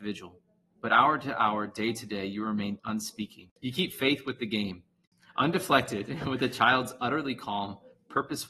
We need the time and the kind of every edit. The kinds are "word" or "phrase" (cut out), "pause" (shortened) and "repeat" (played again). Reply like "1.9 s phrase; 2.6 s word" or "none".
2.8 s word